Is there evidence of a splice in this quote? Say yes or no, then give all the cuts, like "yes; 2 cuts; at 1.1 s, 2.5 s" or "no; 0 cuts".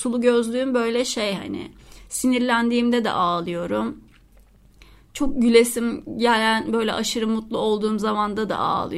no; 0 cuts